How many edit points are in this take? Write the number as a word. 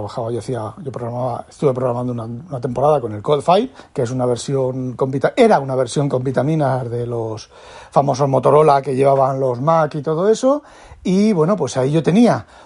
one